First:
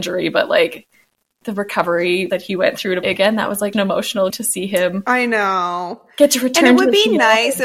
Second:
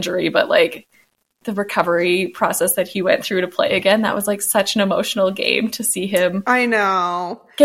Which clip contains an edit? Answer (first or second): first